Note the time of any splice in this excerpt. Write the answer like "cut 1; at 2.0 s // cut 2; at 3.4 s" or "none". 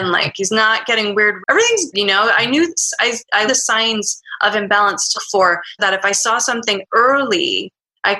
cut 1; at 1.4 s // cut 2; at 1.9 s // cut 3; at 3.0 s // cut 4; at 3.5 s // cut 5; at 5.1 s // cut 6; at 5.8 s